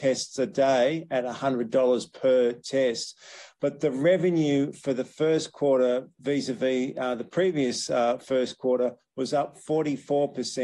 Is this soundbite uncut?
yes; 0 cuts

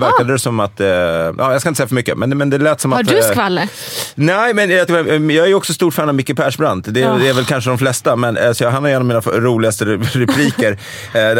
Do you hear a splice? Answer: yes; 1 cut; at 4.9 s

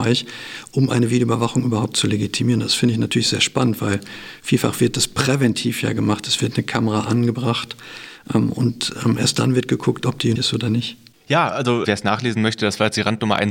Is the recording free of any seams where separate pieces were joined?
no; 2 cuts; at 10.4 s, 11.8 s

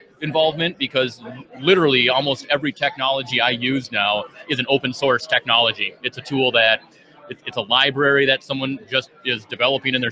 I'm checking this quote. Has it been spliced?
no; 0 cuts

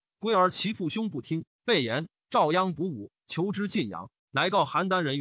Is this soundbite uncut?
no; 1 cut; at 4.2 s

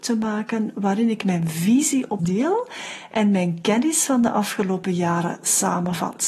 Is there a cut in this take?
yes; 1 cut; at 2.2 s

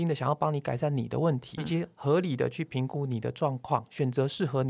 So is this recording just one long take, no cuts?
no; 1 cut; at 1.6 s

